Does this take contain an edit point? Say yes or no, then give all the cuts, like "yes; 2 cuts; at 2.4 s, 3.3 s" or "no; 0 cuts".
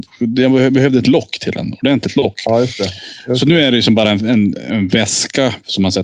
no; 0 cuts